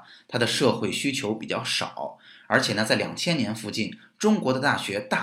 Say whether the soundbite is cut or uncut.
uncut